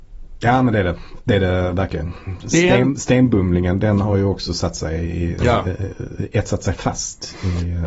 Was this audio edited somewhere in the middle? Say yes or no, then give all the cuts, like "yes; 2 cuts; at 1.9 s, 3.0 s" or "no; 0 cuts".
no; 0 cuts